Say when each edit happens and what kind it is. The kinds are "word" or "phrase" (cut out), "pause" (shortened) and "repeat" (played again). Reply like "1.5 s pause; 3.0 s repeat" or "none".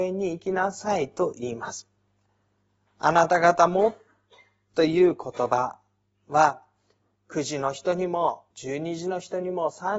8.5 s pause

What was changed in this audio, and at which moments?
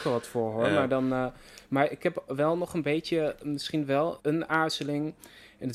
4.2 s word

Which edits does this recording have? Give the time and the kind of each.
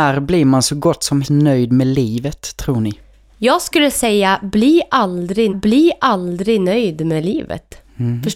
1.2 s word; 5.5 s repeat

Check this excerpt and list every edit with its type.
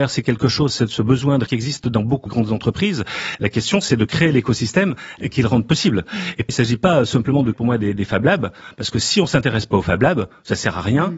1.5 s word; 2.3 s word; 6.5 s word; 7.5 s word

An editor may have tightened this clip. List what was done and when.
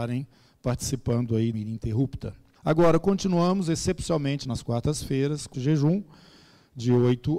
1.5 s phrase; 2.5 s pause; 4.4 s word; 5.5 s word

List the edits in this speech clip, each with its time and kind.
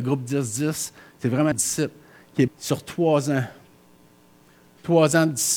1.5 s phrase; 2.5 s word

